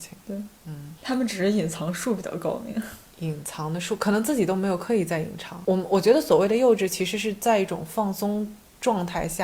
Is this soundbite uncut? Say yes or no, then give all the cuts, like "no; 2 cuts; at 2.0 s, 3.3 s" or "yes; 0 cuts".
no; 1 cut; at 1.0 s